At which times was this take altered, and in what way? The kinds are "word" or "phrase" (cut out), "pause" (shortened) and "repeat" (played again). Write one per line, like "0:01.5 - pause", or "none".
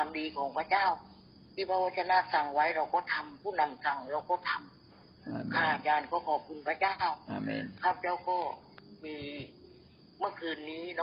none

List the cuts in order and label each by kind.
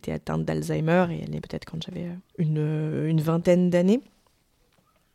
0:01.4 - word
0:02.3 - pause

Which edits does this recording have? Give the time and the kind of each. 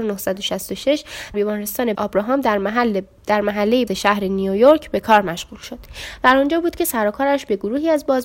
0:01.3 - word
0:01.9 - word
0:03.9 - word

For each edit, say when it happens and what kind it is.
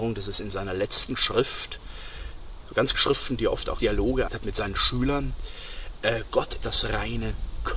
0:02.9 - word
0:03.8 - word
0:04.3 - word
0:06.6 - word

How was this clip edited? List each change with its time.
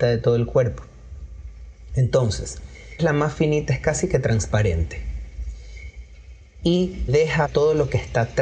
0:03.0 - word
0:07.1 - word
0:07.4 - phrase

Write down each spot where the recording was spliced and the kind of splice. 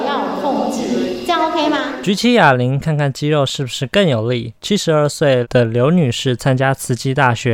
0:04.6 - pause

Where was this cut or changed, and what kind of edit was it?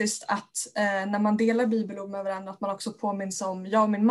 none

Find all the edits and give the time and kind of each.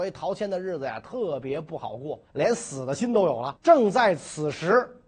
0:02.2 - pause
0:03.6 - pause

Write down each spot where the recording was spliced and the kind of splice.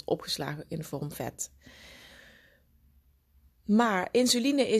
0:01.1 - word

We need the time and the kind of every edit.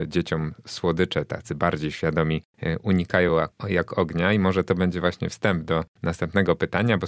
none

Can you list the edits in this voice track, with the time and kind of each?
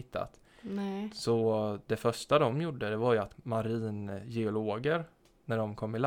0:03.3 - word

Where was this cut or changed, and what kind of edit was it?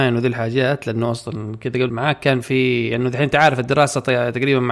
0:01.9 - word

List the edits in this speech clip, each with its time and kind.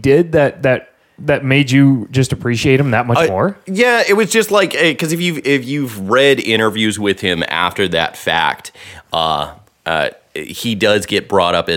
none

